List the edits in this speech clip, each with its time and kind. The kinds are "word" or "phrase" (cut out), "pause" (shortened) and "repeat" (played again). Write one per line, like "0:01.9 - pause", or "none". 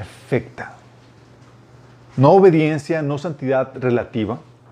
none

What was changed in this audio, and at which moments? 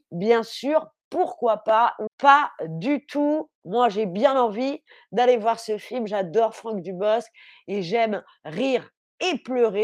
0:02.1 - word

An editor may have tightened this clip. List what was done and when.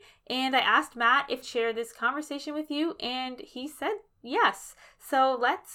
0:01.4 - phrase

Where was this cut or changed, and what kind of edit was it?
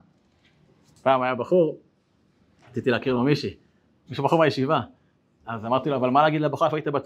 none

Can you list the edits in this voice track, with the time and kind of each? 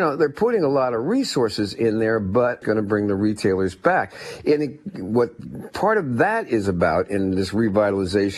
0:02.6 - phrase

